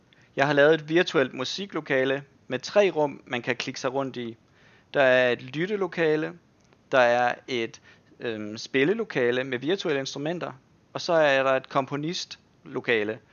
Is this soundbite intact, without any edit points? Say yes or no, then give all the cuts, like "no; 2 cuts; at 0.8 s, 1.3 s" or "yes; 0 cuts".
yes; 0 cuts